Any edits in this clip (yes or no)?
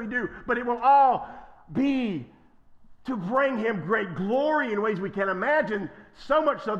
no